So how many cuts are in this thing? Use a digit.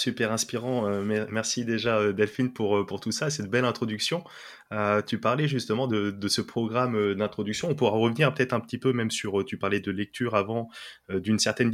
0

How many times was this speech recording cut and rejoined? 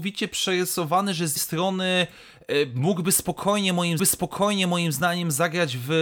2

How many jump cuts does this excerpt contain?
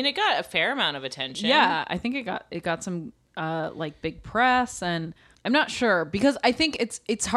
1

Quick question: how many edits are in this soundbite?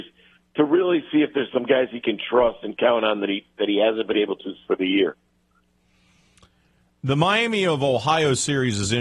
0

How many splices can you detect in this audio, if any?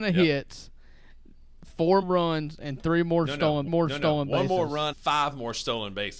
3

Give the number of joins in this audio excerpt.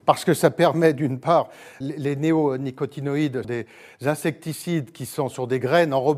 2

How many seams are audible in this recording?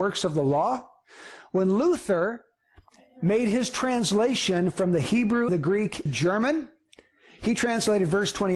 2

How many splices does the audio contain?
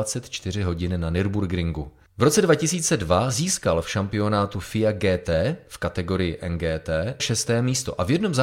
1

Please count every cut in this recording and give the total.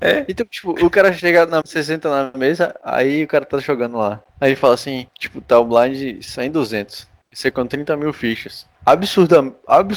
5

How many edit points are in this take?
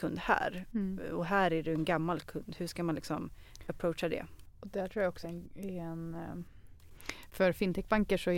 1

